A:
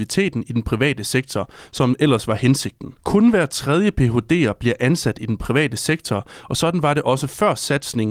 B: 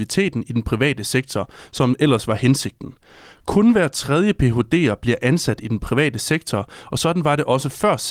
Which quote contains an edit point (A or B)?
A